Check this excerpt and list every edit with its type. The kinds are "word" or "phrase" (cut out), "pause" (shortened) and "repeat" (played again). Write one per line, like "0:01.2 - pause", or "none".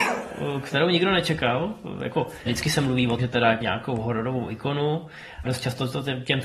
0:02.5 - word
0:03.2 - word
0:03.6 - word
0:05.4 - word

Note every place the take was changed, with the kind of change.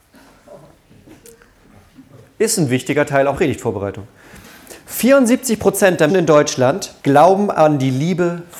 0:03.3 - word
0:04.8 - pause
0:06.1 - word
0:07.0 - pause

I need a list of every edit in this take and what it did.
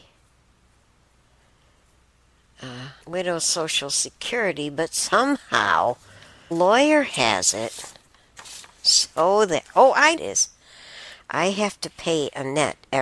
0:03.0 - pause
0:06.5 - word
0:10.2 - phrase

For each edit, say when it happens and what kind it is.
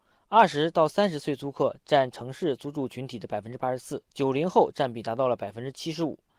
0:04.1 - pause

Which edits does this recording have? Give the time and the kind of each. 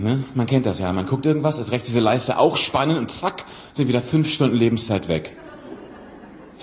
none

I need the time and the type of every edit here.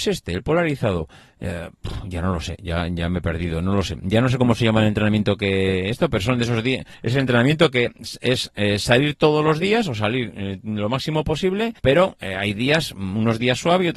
0:06.9 - pause
0:11.8 - pause

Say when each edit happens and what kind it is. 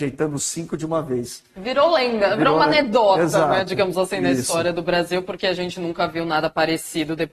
none

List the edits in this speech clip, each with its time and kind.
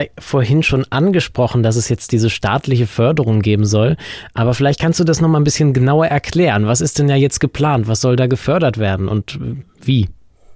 none

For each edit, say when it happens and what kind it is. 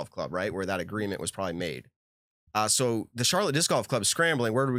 none

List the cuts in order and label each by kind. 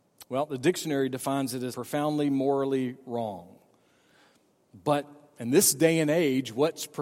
0:01.7 - word

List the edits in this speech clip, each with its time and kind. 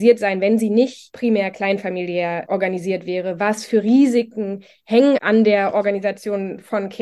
0:05.2 - word

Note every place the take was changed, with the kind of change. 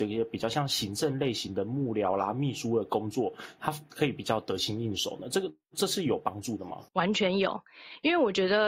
0:06.9 - pause

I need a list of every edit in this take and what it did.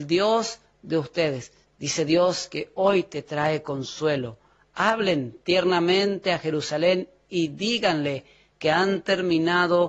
0:01.6 - pause

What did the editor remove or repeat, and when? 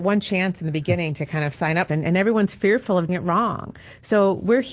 0:01.9 - phrase
0:03.1 - word

